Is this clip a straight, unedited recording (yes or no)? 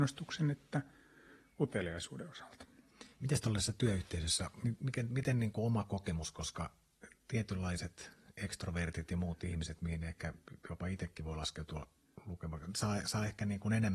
no